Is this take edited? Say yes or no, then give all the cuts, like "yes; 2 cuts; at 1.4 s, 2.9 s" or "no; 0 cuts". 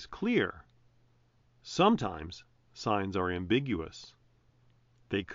no; 0 cuts